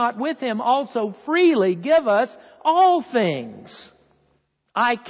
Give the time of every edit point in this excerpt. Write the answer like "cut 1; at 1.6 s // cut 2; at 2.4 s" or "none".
none